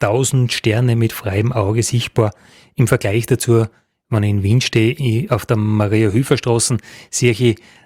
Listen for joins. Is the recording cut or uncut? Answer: uncut